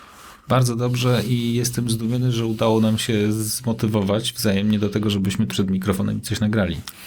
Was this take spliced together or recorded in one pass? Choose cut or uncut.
cut